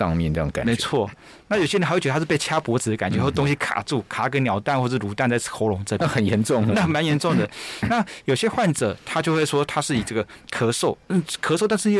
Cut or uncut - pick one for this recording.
cut